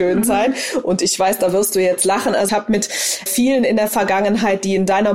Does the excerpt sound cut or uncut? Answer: cut